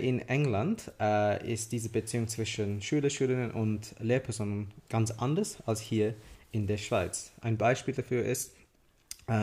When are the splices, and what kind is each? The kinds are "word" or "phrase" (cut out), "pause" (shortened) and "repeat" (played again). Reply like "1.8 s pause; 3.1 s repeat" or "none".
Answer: none